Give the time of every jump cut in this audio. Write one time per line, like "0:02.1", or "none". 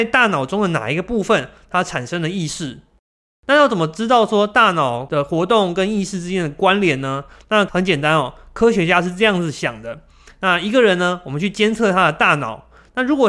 none